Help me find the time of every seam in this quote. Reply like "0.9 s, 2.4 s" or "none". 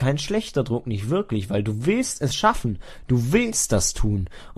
none